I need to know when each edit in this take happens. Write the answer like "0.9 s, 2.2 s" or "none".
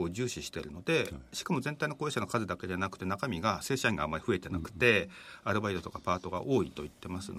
none